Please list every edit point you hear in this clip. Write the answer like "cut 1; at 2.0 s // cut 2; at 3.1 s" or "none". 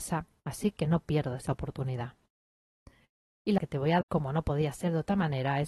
cut 1; at 1.5 s // cut 2; at 3.6 s // cut 3; at 4.0 s